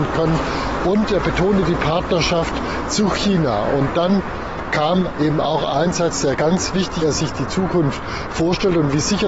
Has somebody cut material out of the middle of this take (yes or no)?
yes